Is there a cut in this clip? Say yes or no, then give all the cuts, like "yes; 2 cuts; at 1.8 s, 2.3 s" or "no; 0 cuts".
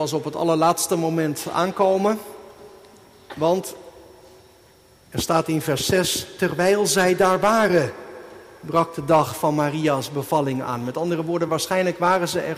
no; 0 cuts